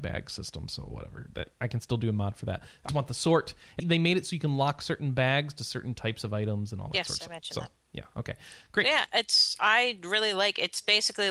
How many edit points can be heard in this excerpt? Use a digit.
2